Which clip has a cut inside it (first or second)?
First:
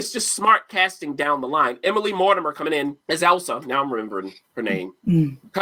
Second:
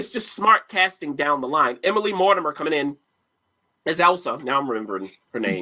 first